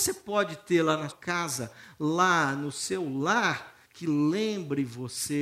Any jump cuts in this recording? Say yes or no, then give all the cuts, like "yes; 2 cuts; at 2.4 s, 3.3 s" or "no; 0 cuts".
yes; 2 cuts; at 1.1 s, 3.8 s